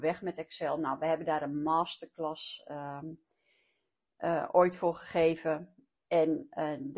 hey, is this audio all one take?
yes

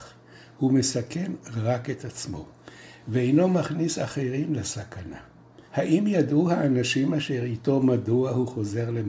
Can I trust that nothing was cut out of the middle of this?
no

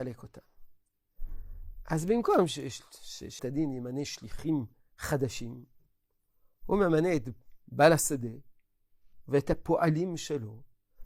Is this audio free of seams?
no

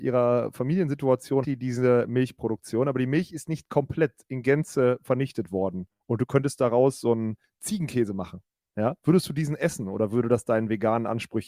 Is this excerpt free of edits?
no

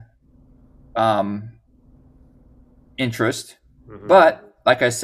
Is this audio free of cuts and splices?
yes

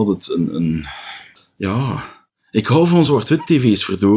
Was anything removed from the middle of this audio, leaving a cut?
no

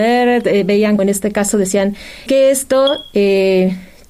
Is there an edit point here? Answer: yes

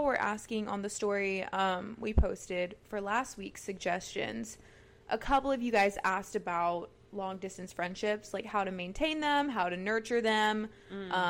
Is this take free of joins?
yes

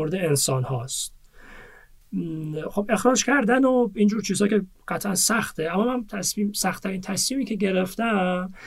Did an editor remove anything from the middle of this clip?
no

